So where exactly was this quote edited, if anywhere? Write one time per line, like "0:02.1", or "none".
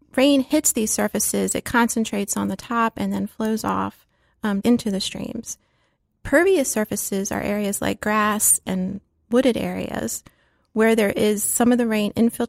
0:04.6